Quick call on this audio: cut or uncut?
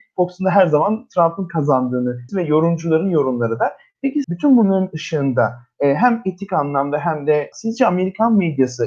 cut